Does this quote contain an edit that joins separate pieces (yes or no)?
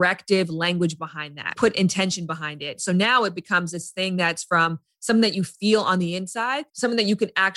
yes